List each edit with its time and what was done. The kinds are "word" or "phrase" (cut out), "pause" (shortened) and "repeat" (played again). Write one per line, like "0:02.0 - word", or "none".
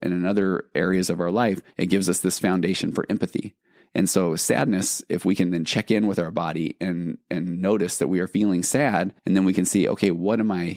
0:01.7 - pause
0:09.2 - pause